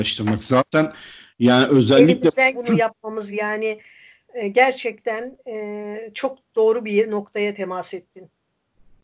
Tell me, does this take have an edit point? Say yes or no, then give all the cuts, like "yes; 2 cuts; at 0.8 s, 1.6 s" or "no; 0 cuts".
yes; 2 cuts; at 2.5 s, 3.3 s